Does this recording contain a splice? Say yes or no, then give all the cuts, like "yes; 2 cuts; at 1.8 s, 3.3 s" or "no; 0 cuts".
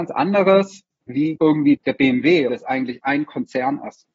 yes; 3 cuts; at 1.4 s, 1.8 s, 2.5 s